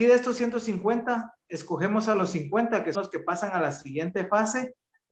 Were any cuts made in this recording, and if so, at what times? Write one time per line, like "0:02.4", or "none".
0:02.9